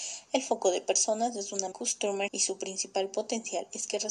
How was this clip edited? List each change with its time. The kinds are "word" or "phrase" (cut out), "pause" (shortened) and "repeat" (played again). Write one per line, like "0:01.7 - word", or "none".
0:01.7 - word
0:02.3 - word